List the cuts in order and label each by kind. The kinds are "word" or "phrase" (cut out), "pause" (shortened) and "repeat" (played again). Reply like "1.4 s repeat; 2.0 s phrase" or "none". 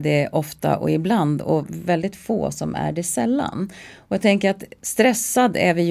none